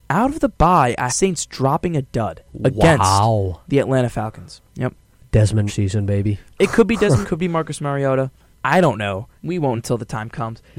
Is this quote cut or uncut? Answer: cut